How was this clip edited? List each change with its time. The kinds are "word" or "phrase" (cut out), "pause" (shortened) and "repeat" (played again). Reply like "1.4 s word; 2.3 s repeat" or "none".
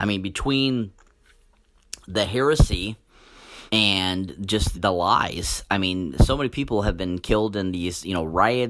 3.7 s pause; 4.7 s word